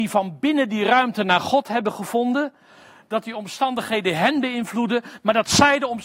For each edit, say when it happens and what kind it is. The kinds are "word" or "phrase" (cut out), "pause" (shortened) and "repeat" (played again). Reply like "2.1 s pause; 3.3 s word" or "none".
none